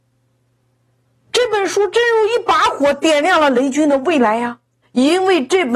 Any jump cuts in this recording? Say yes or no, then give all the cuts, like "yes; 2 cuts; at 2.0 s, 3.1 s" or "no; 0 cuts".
yes; 1 cut; at 4.8 s